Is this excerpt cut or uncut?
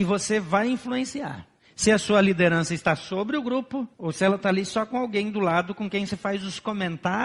cut